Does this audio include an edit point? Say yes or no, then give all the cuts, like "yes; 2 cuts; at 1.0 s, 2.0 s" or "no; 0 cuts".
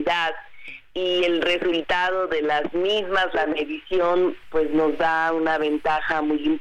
no; 0 cuts